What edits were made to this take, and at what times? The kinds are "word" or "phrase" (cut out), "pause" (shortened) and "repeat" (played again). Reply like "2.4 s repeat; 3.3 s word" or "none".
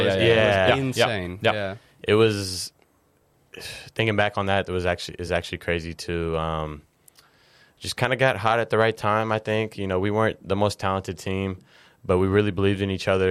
none